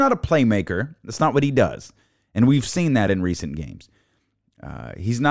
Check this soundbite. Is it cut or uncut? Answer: uncut